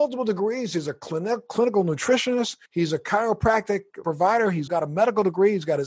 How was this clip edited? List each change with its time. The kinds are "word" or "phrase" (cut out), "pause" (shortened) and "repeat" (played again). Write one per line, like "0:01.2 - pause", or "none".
0:02.7 - pause
0:04.0 - word
0:04.7 - word